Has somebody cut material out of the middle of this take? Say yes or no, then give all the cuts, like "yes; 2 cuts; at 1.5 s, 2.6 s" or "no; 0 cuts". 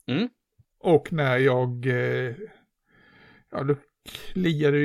no; 0 cuts